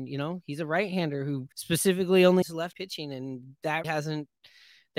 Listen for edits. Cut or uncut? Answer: cut